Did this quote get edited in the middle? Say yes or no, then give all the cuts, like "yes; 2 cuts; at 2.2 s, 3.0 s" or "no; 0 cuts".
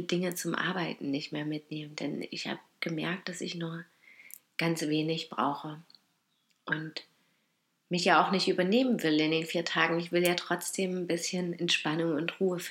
no; 0 cuts